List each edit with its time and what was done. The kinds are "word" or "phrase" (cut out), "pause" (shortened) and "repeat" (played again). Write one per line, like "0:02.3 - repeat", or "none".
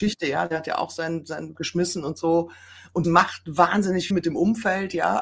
0:01.5 - word
0:03.0 - word
0:04.1 - word